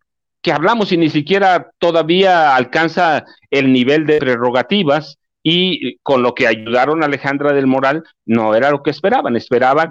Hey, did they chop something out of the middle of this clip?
no; 0 cuts

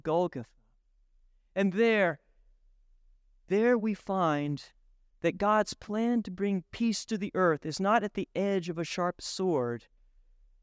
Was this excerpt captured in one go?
yes; 0 cuts

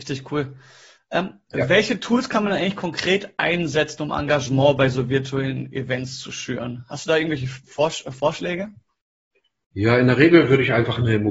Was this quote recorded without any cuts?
yes; 0 cuts

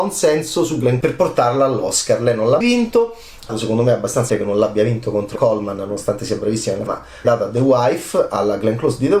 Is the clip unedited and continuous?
no; 7 cuts; at 1.0 s, 2.6 s, 3.5 s, 4.3 s, 5.4 s, 6.9 s, 7.2 s

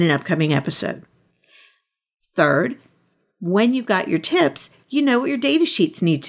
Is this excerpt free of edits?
yes; 0 cuts

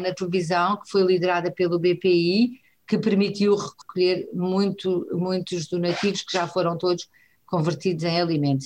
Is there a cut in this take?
no; 0 cuts

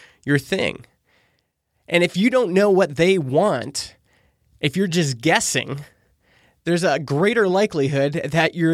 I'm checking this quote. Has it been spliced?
no; 0 cuts

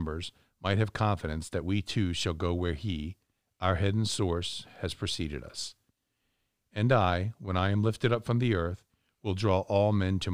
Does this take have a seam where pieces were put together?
no; 0 cuts

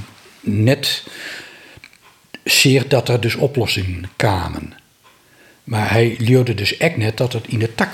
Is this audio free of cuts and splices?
yes; 0 cuts

